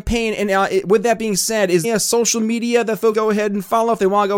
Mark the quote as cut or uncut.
cut